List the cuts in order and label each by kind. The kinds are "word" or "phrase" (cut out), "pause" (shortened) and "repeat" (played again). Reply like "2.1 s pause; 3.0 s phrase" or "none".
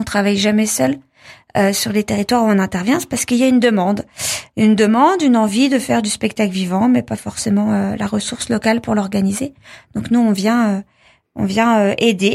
none